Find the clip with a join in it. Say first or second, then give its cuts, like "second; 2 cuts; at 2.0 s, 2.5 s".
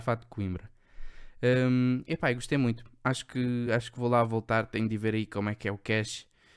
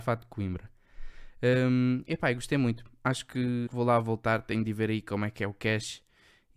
second; 1 cut; at 3.7 s